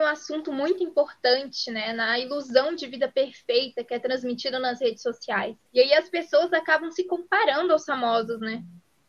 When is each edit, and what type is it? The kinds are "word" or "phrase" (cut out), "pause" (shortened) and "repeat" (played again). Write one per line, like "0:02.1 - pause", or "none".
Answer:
0:05.7 - pause